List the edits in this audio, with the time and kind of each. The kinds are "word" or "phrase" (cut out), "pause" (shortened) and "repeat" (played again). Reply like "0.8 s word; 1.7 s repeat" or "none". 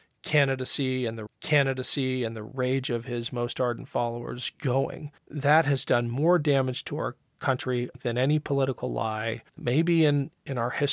1.3 s repeat; 5.2 s pause; 9.5 s pause